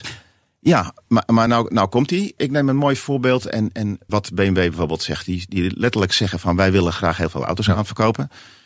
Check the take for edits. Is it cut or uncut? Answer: uncut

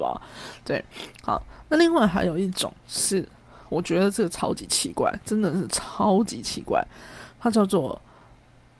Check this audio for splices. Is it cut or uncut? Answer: uncut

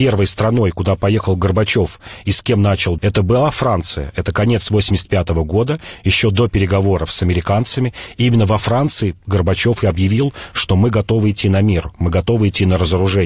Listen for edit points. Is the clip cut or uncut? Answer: cut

